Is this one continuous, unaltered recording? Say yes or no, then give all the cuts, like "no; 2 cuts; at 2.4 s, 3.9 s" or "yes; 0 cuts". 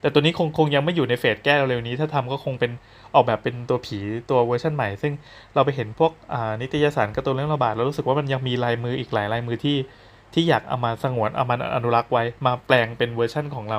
yes; 0 cuts